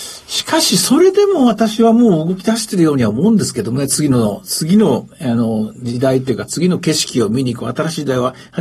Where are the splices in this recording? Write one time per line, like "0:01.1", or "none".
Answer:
none